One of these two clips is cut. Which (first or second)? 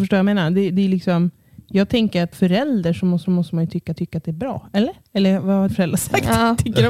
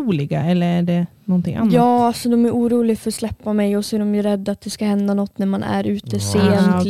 first